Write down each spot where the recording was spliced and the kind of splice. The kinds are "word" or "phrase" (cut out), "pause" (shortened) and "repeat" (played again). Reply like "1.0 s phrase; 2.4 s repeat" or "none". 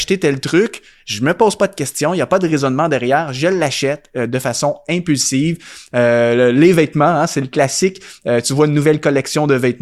none